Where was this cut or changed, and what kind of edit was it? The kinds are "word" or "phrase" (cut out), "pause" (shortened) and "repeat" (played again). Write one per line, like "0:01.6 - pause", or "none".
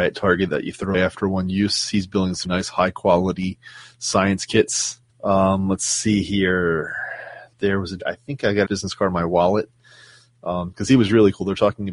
0:00.9 - word
0:02.4 - word
0:05.1 - pause
0:07.5 - pause
0:08.0 - phrase
0:08.6 - word